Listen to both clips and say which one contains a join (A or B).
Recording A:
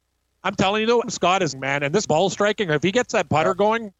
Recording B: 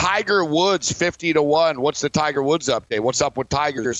A